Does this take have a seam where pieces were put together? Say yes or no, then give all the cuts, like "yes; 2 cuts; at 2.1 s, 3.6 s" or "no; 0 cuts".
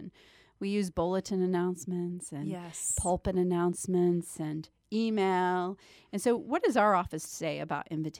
no; 0 cuts